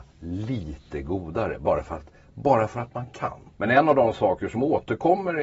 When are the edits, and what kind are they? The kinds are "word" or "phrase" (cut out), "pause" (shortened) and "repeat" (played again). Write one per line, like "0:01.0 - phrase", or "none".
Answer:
none